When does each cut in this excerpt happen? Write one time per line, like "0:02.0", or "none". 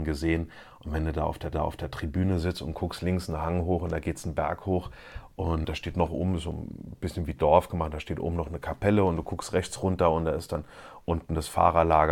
0:01.5
0:05.6